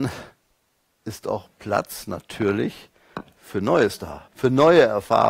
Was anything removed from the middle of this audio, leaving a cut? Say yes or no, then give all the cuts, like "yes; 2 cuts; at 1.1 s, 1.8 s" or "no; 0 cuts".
yes; 1 cut; at 4.3 s